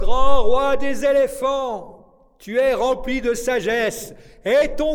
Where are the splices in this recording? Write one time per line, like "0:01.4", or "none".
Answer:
none